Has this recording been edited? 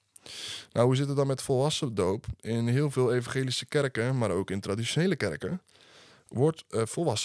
no; 0 cuts

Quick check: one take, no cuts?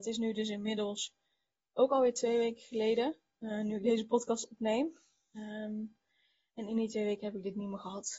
yes; 0 cuts

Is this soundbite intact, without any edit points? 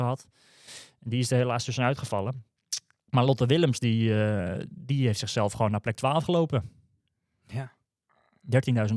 yes; 0 cuts

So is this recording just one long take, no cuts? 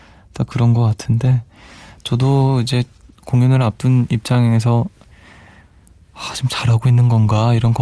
yes; 0 cuts

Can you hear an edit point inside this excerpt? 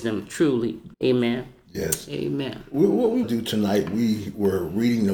yes; 2 cuts; at 0.9 s, 3.2 s

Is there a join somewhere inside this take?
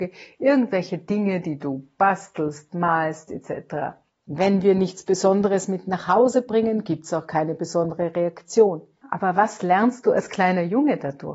no; 0 cuts

